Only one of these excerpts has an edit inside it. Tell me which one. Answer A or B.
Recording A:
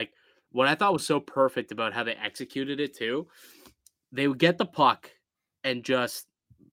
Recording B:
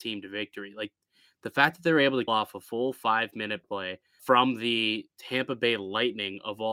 B